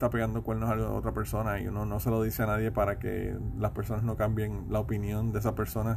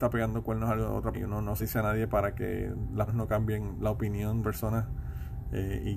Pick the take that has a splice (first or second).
second